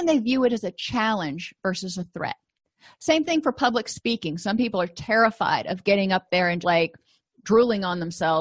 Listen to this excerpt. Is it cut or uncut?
cut